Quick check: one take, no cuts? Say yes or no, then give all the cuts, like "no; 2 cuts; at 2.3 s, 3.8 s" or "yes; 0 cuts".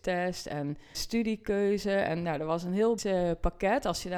no; 2 cuts; at 0.9 s, 3.0 s